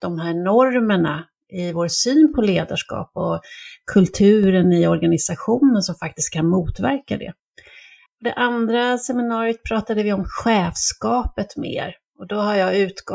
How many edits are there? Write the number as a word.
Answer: zero